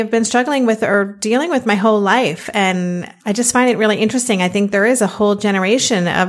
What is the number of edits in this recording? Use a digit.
1